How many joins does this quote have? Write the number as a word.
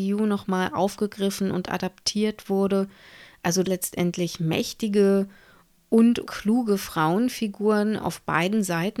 two